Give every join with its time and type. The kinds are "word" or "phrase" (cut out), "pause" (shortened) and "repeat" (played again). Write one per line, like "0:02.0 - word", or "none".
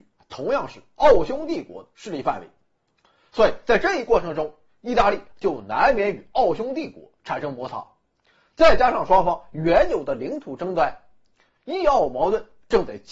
none